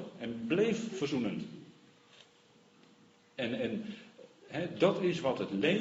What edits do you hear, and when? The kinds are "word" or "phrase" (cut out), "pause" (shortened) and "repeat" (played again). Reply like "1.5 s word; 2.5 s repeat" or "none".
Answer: none